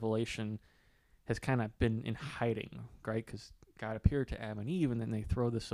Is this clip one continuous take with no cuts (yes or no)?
yes